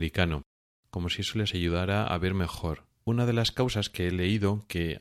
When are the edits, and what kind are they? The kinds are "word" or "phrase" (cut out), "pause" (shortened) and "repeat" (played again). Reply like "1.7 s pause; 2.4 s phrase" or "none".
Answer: 2.9 s pause